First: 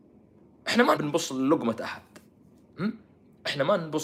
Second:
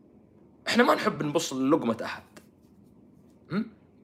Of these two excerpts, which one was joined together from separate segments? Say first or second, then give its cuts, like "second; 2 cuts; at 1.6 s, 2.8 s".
first; 2 cuts; at 1.0 s, 2.4 s